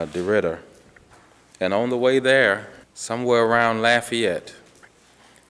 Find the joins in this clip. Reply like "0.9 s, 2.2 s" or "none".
2.8 s